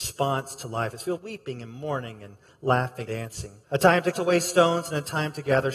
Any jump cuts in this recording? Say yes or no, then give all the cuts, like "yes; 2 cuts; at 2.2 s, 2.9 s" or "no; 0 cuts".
yes; 4 cuts; at 1.2 s, 3.1 s, 3.6 s, 4.1 s